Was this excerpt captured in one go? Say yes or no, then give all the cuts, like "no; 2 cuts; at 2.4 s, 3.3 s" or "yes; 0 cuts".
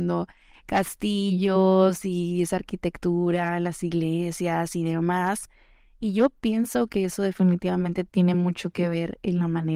yes; 0 cuts